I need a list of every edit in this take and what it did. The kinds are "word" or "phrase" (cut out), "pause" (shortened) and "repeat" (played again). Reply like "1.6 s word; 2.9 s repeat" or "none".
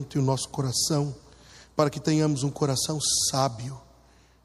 none